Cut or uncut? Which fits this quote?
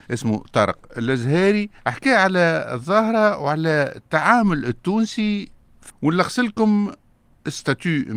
cut